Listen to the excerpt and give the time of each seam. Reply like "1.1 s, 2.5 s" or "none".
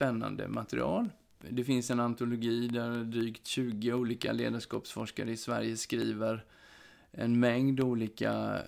none